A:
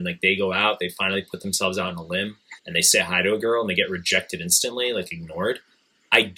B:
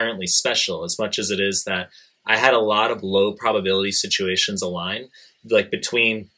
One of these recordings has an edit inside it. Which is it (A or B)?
A